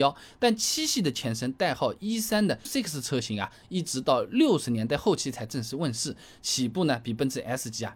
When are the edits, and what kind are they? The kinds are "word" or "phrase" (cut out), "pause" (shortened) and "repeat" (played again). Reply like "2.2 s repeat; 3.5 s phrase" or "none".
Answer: 2.6 s word